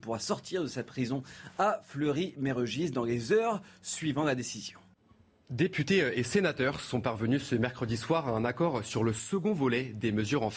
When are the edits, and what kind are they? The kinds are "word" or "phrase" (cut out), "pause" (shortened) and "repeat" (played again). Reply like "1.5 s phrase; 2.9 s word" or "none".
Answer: none